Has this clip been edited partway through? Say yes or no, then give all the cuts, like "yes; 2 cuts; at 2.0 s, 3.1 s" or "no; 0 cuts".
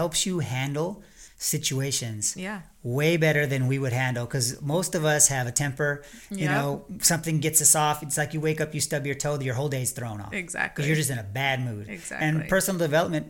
no; 0 cuts